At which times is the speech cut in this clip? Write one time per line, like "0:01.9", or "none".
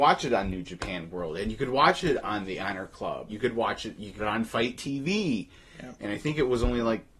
0:03.3
0:04.2